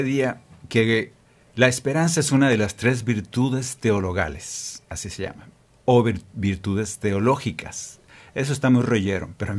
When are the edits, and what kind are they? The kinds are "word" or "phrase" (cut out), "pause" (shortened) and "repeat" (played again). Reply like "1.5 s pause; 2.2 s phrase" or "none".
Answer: 1.2 s pause